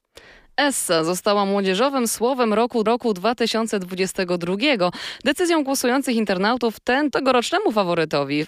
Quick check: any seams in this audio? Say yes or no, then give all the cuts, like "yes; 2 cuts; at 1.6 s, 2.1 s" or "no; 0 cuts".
yes; 2 cuts; at 2.9 s, 7.1 s